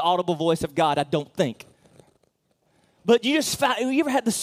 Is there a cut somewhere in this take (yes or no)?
no